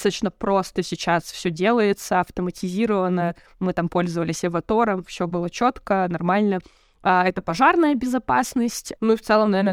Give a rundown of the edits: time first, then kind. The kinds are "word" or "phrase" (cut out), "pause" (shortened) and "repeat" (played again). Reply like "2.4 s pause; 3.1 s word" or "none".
none